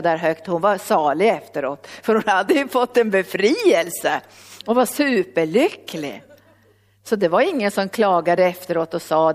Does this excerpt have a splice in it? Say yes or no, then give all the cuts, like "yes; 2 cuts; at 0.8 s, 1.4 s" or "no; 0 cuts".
no; 0 cuts